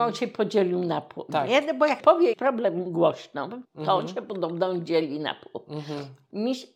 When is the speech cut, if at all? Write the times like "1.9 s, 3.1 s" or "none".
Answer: 2.0 s, 2.3 s, 3.6 s